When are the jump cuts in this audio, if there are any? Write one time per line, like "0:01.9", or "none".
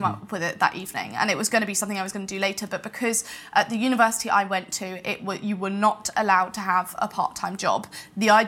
none